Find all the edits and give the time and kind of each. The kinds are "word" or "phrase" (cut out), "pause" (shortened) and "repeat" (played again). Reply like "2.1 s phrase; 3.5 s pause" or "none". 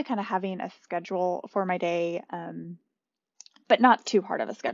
none